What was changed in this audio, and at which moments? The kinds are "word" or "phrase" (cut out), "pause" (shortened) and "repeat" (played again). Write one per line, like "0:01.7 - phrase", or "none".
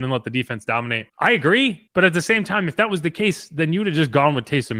0:01.1 - pause
0:01.9 - pause